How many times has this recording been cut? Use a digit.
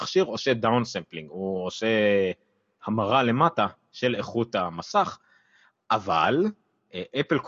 0